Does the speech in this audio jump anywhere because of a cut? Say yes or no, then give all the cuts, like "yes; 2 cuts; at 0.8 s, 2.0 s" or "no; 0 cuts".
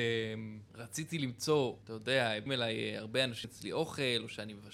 yes; 3 cuts; at 1.8 s, 2.5 s, 3.4 s